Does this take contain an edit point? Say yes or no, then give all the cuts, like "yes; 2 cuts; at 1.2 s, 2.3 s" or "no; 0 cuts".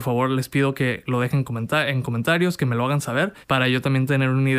yes; 1 cut; at 3.4 s